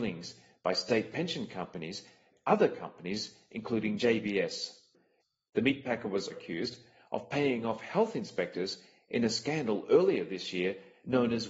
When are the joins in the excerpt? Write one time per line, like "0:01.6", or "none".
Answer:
0:02.3
0:06.3